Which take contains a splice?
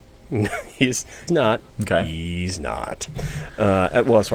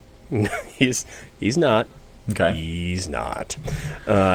first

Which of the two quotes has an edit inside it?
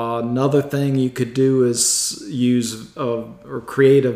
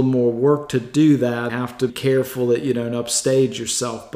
second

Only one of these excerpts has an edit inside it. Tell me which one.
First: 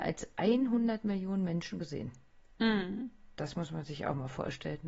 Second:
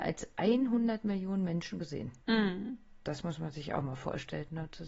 second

